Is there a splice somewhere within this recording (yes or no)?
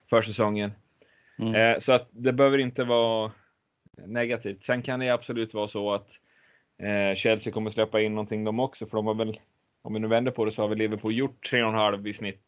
no